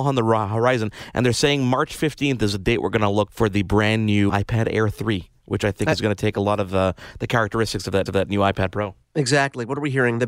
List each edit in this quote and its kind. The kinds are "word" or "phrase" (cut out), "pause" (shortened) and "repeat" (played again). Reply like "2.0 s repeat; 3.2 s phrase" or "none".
3.3 s word; 4.3 s word; 8.1 s repeat; 9.0 s pause